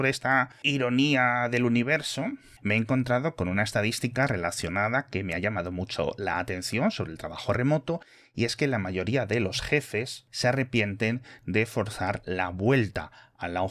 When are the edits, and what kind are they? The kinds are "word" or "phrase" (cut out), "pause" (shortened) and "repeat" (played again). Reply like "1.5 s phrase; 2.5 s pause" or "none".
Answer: none